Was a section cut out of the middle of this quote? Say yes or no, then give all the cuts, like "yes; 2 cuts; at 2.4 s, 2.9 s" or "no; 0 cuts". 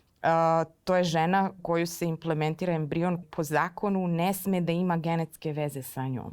yes; 2 cuts; at 1.6 s, 3.2 s